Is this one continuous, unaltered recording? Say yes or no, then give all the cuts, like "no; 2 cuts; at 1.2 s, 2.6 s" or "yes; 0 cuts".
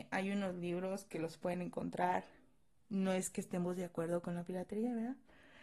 yes; 0 cuts